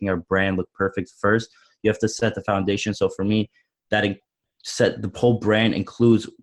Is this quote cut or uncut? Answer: uncut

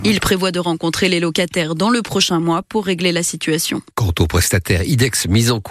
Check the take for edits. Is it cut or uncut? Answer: uncut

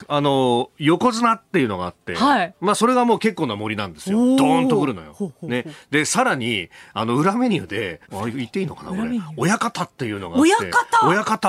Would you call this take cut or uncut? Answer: cut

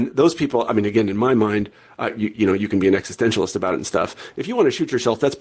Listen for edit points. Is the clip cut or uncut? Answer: uncut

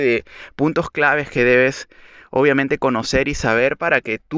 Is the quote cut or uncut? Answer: uncut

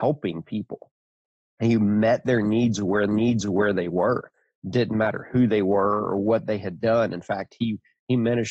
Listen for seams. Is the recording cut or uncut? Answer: cut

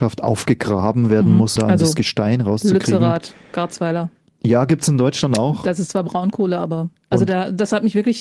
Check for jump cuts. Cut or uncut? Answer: cut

